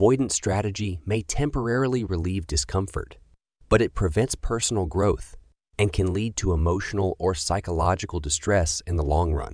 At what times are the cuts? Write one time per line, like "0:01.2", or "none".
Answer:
none